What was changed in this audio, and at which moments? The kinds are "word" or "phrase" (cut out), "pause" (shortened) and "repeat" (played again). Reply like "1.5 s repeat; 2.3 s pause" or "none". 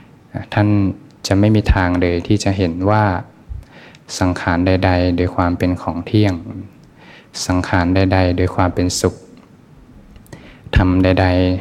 none